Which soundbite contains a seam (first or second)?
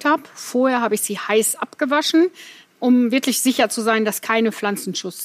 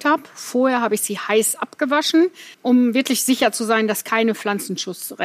second